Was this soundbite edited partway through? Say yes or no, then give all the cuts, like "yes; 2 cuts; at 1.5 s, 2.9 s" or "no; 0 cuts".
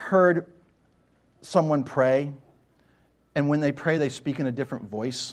no; 0 cuts